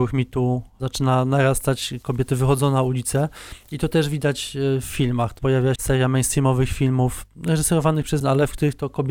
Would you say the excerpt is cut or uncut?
cut